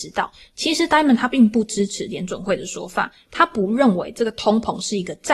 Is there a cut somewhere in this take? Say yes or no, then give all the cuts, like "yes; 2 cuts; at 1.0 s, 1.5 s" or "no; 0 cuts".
no; 0 cuts